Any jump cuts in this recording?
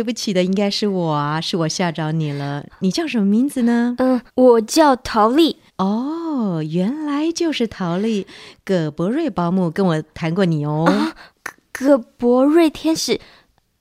yes; 3 cuts; at 4.3 s, 5.7 s, 11.3 s

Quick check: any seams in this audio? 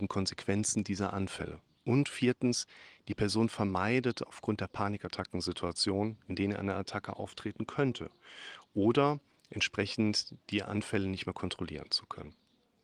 no; 0 cuts

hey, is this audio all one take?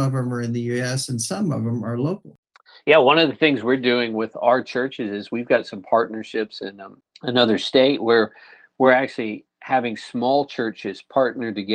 yes; 0 cuts

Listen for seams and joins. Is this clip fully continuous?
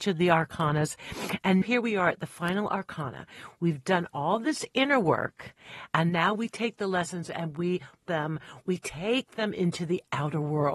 no; 2 cuts; at 1.6 s, 8.0 s

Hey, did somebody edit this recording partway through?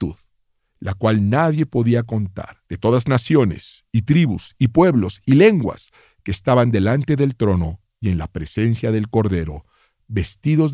yes; 1 cut; at 2.7 s

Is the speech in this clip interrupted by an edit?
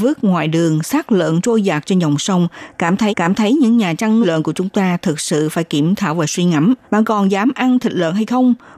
yes; 3 cuts; at 3.1 s, 4.2 s, 6.8 s

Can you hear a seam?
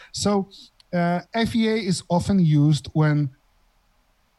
yes; 1 cut; at 1.3 s

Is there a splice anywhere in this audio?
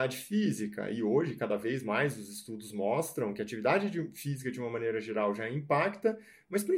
no; 0 cuts

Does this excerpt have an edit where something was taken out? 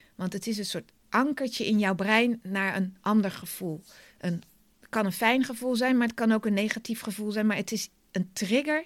no; 0 cuts

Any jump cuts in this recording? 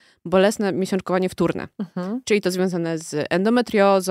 no; 0 cuts

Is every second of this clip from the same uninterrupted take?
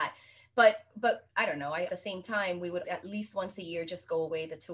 no; 3 cuts; at 1.3 s, 1.9 s, 2.8 s

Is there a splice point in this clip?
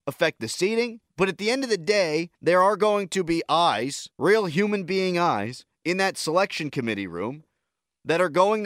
yes; 3 cuts; at 1.1 s, 2.4 s, 4.1 s

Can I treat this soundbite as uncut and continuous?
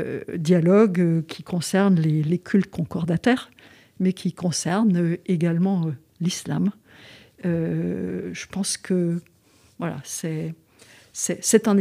yes; 0 cuts

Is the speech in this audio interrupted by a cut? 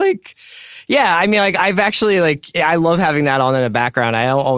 no; 0 cuts

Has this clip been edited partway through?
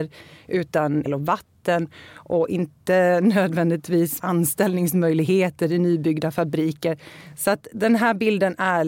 yes; 2 cuts; at 1.1 s, 4.2 s

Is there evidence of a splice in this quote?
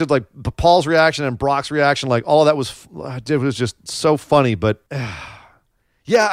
yes; 1 cut; at 4.9 s

